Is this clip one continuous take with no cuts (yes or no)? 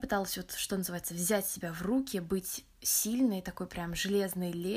yes